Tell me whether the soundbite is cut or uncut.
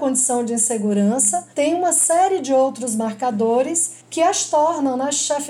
cut